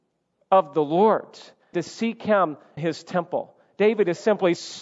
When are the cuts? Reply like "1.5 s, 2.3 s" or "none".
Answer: 1.7 s, 2.8 s